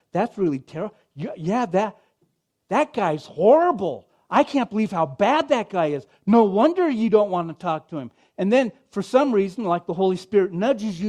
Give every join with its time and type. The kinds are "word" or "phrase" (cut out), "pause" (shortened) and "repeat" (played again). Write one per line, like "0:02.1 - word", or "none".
none